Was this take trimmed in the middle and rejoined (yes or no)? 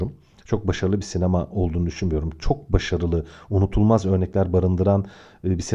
no